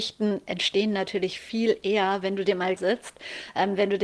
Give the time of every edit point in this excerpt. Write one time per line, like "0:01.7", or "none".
0:02.8